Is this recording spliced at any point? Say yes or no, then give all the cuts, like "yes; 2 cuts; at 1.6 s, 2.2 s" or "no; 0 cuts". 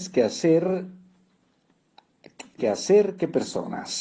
yes; 1 cut; at 2.6 s